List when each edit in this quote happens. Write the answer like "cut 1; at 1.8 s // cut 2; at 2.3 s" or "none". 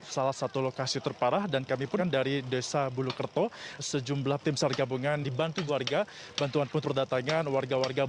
cut 1; at 2.0 s // cut 2; at 3.8 s // cut 3; at 4.4 s // cut 4; at 5.2 s // cut 5; at 5.7 s // cut 6; at 6.8 s

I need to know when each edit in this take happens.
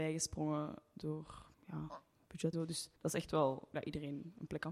cut 1; at 1.5 s // cut 2; at 2.5 s // cut 3; at 3.0 s // cut 4; at 3.7 s

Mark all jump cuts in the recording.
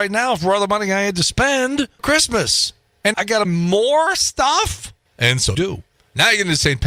cut 1; at 2.0 s // cut 2; at 3.1 s // cut 3; at 3.4 s // cut 4; at 5.5 s

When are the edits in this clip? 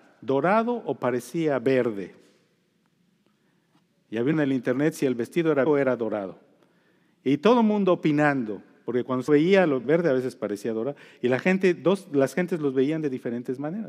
cut 1; at 4.3 s // cut 2; at 5.7 s // cut 3; at 9.3 s // cut 4; at 9.8 s

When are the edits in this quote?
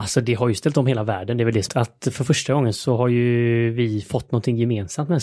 cut 1; at 1.7 s

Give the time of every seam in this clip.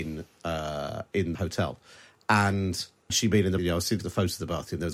cut 1; at 1.3 s // cut 2; at 3.1 s // cut 3; at 3.6 s // cut 4; at 4.0 s

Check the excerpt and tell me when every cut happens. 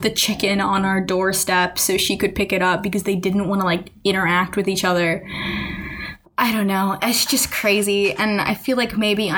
none

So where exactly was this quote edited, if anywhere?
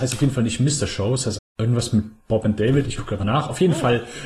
cut 1; at 1.4 s // cut 2; at 3.2 s

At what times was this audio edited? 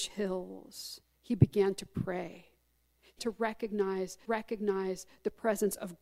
cut 1; at 1.1 s // cut 2; at 3.2 s // cut 3; at 4.2 s

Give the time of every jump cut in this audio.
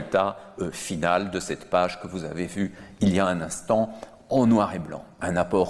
none

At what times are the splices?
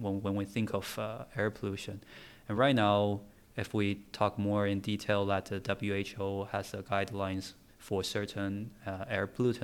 none

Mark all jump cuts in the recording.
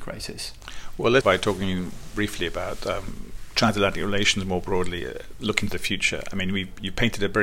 cut 1; at 1.2 s

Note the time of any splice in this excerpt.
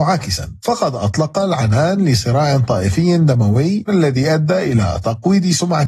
cut 1; at 3.9 s

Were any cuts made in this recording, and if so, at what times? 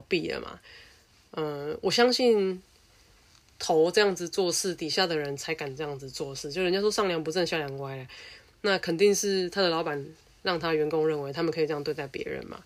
none

